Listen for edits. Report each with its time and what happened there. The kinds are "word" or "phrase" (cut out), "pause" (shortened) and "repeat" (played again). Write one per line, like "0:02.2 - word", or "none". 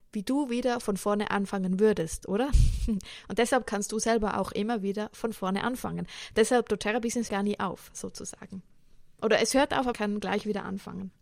0:07.3 - word
0:09.9 - word